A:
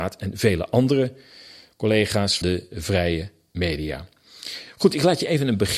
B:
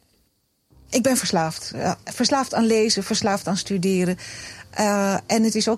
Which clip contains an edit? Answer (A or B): A